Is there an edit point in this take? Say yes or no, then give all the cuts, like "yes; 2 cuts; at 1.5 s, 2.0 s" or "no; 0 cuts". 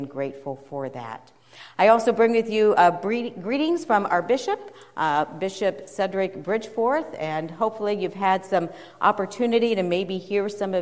no; 0 cuts